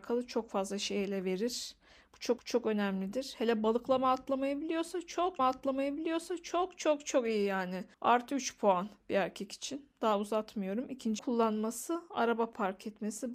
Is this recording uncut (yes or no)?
no